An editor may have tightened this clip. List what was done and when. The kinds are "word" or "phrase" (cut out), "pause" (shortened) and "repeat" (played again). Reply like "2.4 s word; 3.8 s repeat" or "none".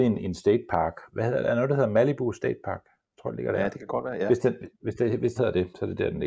1.1 s pause; 4.7 s pause; 5.4 s phrase